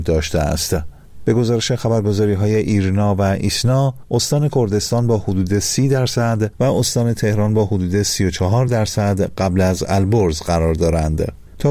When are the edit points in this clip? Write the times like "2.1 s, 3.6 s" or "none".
none